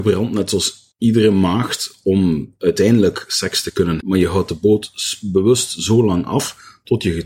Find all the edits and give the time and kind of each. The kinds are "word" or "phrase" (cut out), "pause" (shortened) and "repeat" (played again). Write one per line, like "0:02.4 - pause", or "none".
0:00.9 - pause
0:04.0 - word